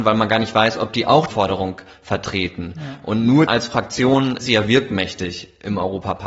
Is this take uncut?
no; 3 cuts; at 1.3 s, 3.5 s, 4.4 s

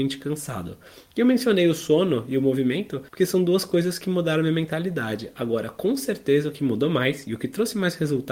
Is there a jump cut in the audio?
yes; 1 cut; at 3.1 s

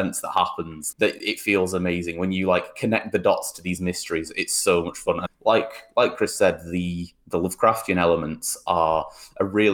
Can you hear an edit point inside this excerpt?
yes; 2 cuts; at 0.9 s, 5.3 s

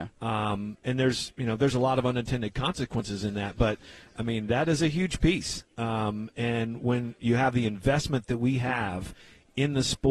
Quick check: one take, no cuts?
yes; 0 cuts

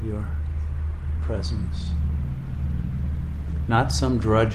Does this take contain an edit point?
yes; 1 cut; at 1.2 s

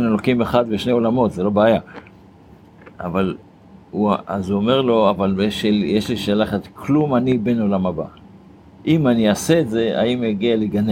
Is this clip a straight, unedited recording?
yes; 0 cuts

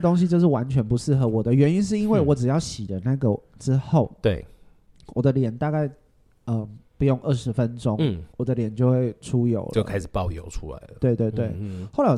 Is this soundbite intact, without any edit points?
no; 1 cut; at 8.3 s

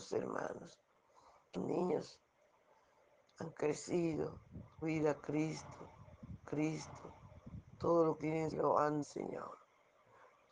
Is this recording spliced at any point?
yes; 6 cuts; at 1.5 s, 4.8 s, 6.4 s, 8.2 s, 8.5 s, 9.0 s

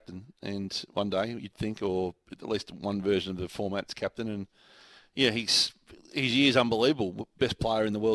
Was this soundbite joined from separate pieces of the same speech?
no; 0 cuts

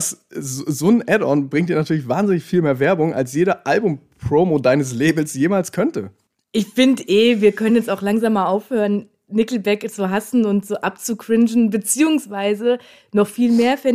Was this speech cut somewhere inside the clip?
no; 0 cuts

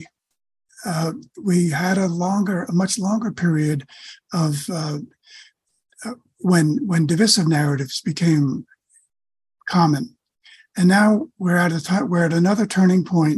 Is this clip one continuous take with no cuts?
yes; 0 cuts

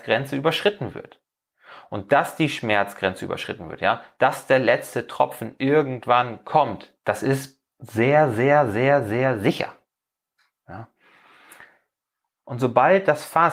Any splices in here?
yes; 2 cuts; at 7.0 s, 7.7 s

